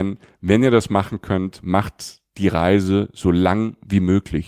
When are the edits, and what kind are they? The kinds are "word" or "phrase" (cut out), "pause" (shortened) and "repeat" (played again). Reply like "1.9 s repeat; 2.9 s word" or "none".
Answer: none